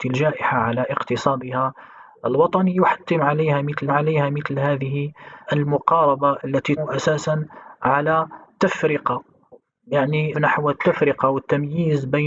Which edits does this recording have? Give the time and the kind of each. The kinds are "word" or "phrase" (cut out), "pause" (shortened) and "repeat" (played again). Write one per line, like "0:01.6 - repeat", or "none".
0:03.9 - repeat
0:06.4 - word
0:06.8 - word
0:10.3 - word

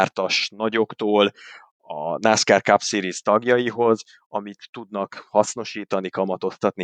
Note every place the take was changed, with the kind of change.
none

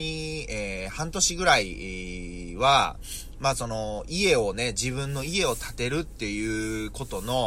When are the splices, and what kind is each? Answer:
none

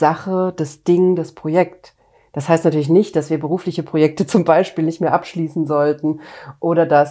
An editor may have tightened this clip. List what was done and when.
none

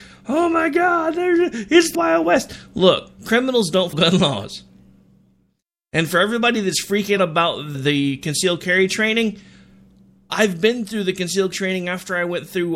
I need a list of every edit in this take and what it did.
0:01.9 - word
0:03.9 - word
0:07.2 - word
0:07.7 - word
0:10.3 - word
0:11.5 - word

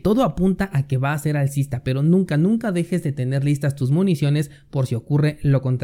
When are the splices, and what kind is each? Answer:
none

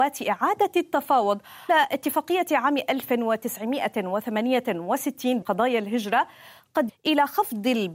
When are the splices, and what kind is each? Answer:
0:01.7 - word
0:05.4 - word
0:06.9 - word

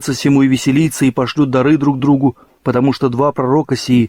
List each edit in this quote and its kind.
none

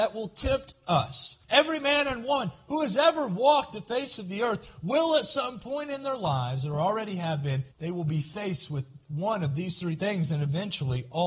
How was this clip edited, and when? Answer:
0:01.4 - pause
0:07.7 - pause

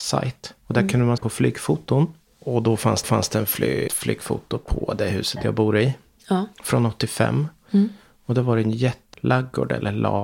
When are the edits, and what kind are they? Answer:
0:01.2 - word
0:03.0 - repeat
0:03.9 - word
0:06.5 - pause
0:09.1 - word

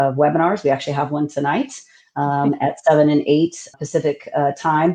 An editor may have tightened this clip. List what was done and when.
0:03.7 - word

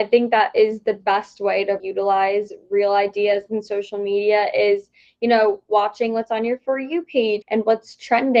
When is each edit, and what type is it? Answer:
0:01.8 - word
0:07.4 - word

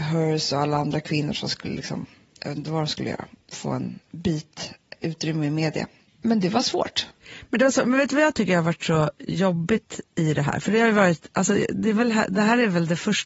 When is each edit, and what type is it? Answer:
0:04.0 - pause

